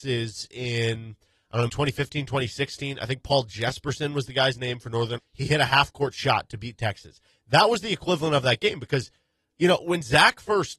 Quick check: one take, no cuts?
no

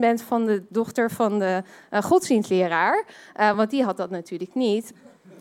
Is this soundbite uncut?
yes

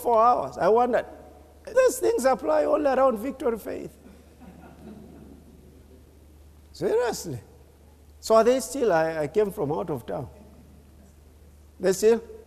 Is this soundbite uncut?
no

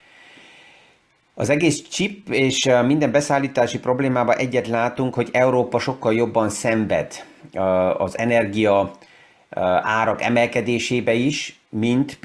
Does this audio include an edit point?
no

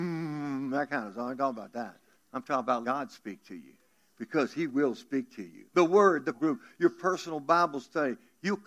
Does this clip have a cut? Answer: yes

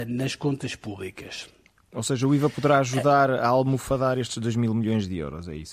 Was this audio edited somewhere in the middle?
no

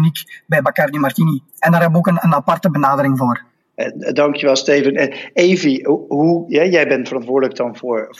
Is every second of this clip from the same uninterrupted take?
no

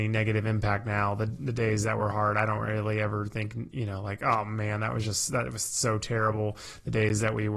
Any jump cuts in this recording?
no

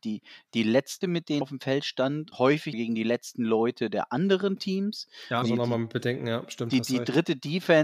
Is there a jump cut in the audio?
yes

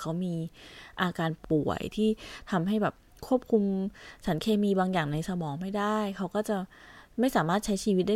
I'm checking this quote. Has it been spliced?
no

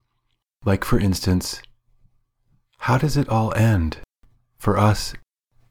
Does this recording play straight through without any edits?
yes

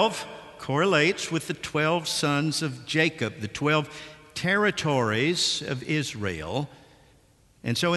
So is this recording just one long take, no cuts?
yes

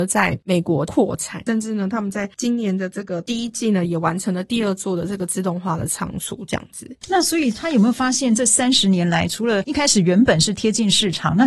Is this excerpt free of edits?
yes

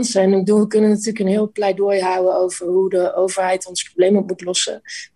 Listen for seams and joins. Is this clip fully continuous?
yes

